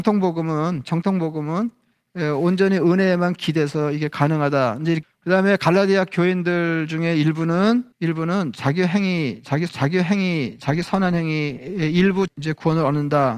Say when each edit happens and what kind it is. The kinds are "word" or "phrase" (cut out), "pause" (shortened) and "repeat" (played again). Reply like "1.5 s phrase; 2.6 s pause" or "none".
5.0 s phrase; 7.9 s pause; 9.7 s repeat; 12.3 s phrase